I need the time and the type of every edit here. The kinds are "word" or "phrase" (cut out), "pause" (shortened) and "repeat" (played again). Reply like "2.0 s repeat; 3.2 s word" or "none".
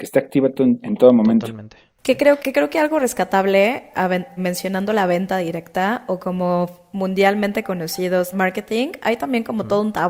2.4 s word; 4.4 s word; 8.3 s word